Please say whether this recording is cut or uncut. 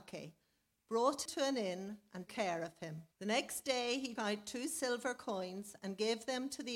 cut